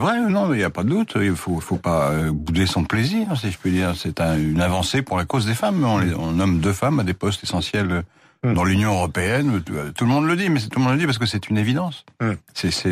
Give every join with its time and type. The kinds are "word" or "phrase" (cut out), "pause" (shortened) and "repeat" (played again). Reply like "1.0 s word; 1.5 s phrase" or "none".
none